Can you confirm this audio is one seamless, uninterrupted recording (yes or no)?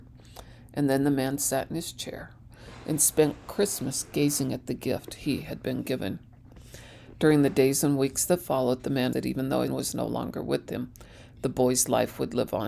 no